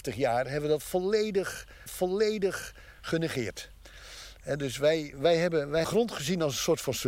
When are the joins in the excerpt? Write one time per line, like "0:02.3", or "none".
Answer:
0:01.9
0:05.1
0:05.8